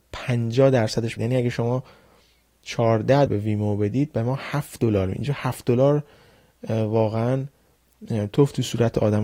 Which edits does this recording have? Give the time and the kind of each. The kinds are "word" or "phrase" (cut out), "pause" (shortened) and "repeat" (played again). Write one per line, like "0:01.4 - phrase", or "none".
0:01.2 - phrase
0:03.3 - word